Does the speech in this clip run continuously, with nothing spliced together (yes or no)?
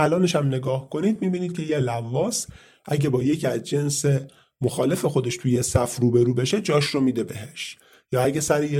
yes